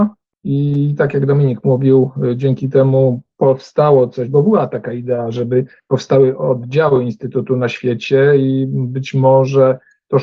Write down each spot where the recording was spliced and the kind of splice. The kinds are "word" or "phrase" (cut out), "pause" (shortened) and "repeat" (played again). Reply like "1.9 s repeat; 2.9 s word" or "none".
none

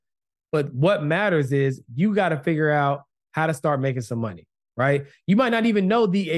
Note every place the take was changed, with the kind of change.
none

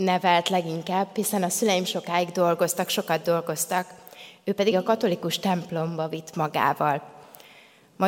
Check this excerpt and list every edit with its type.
4.7 s word

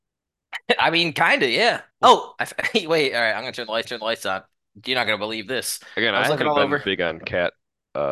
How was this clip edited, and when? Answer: 1.9 s pause; 3.8 s repeat

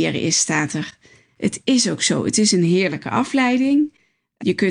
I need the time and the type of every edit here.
none

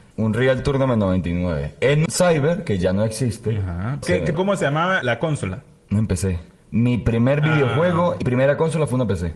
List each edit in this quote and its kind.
2.1 s word; 4.0 s word; 4.3 s word; 5.0 s word; 8.2 s word

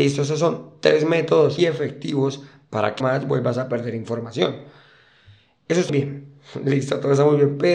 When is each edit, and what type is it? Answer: 1.6 s word; 3.0 s word; 5.9 s word

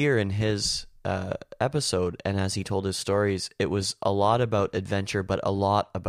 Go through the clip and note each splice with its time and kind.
none

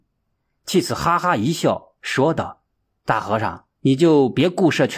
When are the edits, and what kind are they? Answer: 2.7 s pause; 3.7 s pause

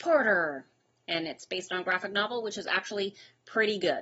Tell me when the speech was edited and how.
none

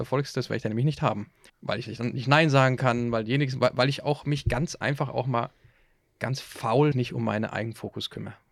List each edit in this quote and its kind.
1.5 s pause; 6.9 s word

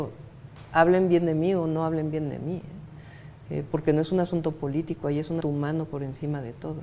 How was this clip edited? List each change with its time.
5.4 s word

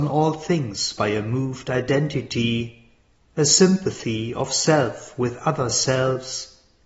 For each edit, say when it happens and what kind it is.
3.2 s pause

